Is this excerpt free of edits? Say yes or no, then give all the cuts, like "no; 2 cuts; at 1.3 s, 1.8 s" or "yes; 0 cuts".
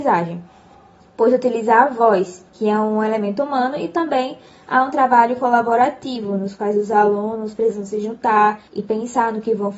no; 2 cuts; at 2.5 s, 8.7 s